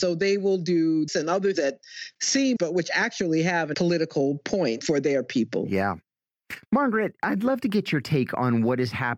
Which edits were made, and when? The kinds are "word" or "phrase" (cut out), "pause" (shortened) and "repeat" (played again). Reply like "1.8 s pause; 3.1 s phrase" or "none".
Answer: 1.1 s word; 1.5 s word; 2.6 s word; 3.7 s word; 4.8 s word